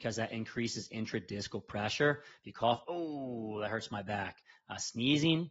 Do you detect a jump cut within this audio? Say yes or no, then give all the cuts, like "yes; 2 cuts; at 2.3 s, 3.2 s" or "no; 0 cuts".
yes; 1 cut; at 2.8 s